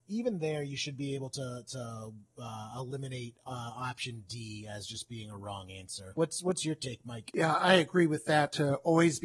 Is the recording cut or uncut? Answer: uncut